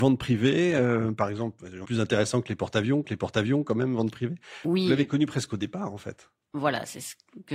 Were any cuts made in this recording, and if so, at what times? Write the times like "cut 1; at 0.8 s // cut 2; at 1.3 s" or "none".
cut 1; at 1.8 s // cut 2; at 3.0 s